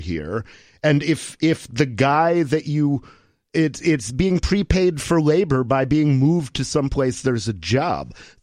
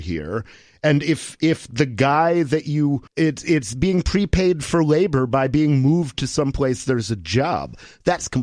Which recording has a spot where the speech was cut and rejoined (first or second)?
second